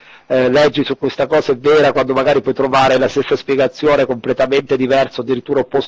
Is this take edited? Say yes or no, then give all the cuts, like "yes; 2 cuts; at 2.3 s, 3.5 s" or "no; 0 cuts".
no; 0 cuts